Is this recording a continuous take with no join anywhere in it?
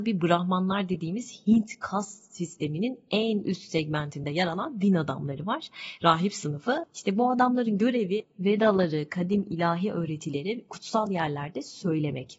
yes; 0 cuts

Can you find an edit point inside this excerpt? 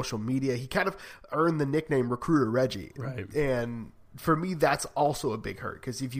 no; 0 cuts

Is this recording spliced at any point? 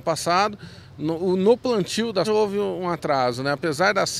yes; 1 cut; at 2.2 s

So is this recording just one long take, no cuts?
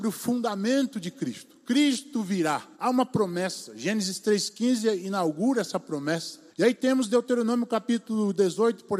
no; 2 cuts; at 2.7 s, 6.5 s

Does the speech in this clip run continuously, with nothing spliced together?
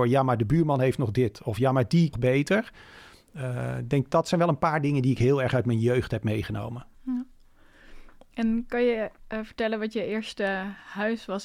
no; 2 cuts; at 2.1 s, 6.9 s

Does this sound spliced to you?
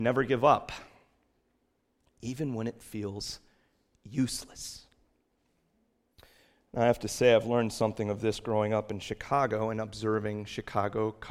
no; 0 cuts

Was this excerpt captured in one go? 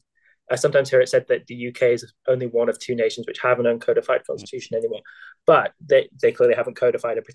no; 1 cut; at 2.2 s

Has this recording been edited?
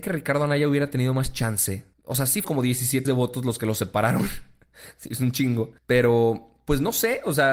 yes; 4 cuts; at 1.9 s, 2.4 s, 3.0 s, 5.8 s

